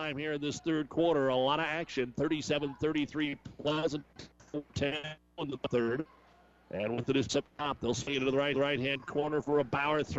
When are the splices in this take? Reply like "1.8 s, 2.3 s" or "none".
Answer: 7.3 s, 8.5 s